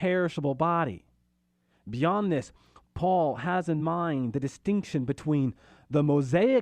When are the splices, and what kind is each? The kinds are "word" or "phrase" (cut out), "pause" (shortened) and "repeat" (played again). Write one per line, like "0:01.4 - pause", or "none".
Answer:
none